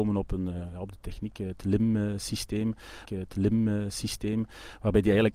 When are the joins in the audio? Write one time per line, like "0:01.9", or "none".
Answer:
0:03.0